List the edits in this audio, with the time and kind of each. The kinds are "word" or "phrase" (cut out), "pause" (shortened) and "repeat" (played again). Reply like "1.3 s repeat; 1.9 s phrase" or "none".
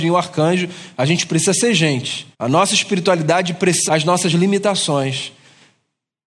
2.3 s pause; 3.9 s phrase